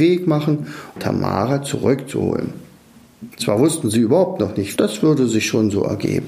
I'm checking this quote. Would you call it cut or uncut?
cut